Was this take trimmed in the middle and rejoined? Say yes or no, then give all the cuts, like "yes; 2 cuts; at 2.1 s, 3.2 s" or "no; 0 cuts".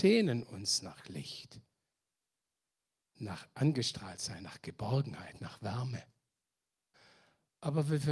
no; 0 cuts